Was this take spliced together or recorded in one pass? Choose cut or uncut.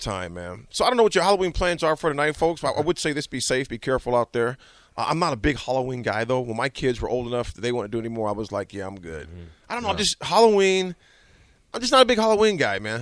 uncut